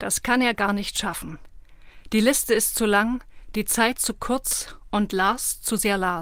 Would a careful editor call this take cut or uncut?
uncut